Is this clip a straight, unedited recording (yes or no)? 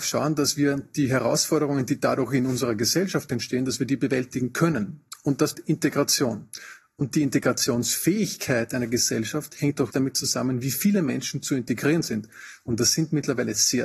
no